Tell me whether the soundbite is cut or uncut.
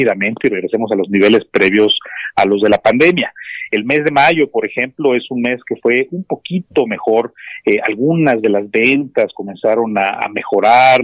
uncut